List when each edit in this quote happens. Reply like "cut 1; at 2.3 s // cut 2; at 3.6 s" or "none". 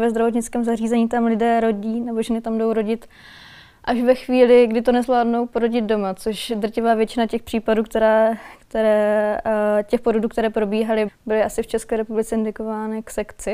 cut 1; at 11.1 s